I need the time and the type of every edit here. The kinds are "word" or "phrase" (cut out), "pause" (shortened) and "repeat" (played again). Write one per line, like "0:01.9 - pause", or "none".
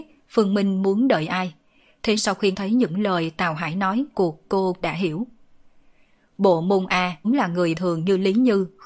0:02.2 - word
0:02.5 - word
0:04.1 - word
0:04.8 - word
0:07.2 - word
0:07.7 - word